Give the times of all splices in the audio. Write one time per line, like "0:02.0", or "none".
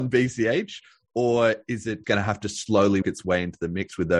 0:02.0
0:03.0

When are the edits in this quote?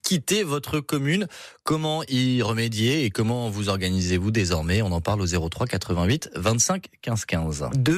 none

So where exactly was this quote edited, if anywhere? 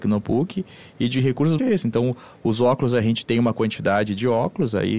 0:01.6

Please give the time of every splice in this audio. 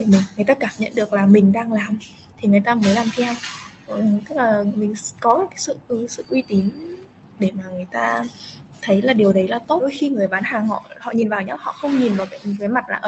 none

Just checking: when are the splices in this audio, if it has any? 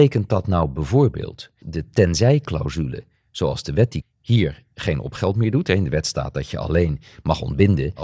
0:01.6
0:04.0

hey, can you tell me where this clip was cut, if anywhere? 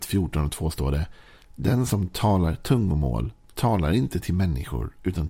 none

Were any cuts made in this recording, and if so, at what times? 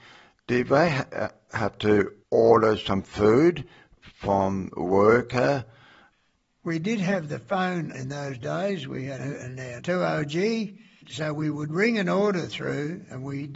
0:02.2
0:07.9
0:09.2
0:09.8

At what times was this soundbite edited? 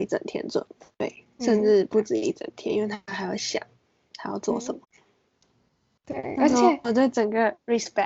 0:01.3
0:04.8

